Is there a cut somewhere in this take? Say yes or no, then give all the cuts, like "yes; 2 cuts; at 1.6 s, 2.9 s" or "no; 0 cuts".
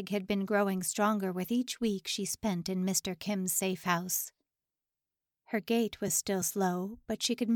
no; 0 cuts